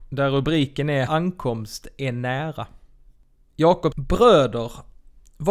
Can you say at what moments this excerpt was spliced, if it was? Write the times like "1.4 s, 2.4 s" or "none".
1.1 s, 3.9 s